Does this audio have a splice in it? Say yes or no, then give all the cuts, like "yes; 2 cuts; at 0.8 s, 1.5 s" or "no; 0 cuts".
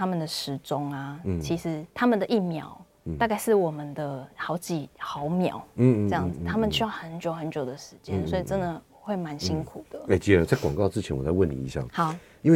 yes; 2 cuts; at 1.9 s, 4.3 s